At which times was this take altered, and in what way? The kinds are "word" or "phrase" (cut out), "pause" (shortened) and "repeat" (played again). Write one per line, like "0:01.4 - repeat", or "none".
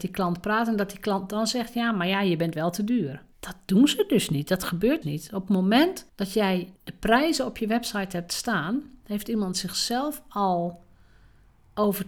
0:03.3 - pause
0:05.0 - word
0:06.1 - pause
0:06.8 - pause